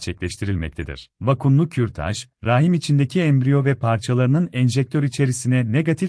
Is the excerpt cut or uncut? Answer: cut